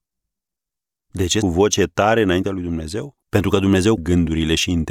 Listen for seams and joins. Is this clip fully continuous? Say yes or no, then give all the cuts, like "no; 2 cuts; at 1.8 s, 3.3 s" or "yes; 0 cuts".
no; 3 cuts; at 1.4 s, 3.2 s, 4.0 s